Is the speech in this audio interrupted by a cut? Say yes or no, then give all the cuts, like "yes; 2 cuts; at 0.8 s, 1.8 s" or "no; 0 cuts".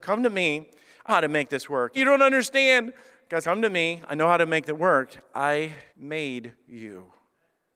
yes; 4 cuts; at 1.1 s, 2.0 s, 3.4 s, 5.9 s